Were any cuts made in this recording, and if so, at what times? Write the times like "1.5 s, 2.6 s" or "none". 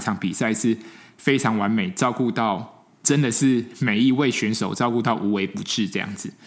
2.9 s